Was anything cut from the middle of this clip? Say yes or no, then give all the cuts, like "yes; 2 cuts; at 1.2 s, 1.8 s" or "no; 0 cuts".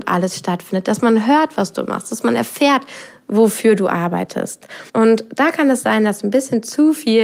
yes; 1 cut; at 4.9 s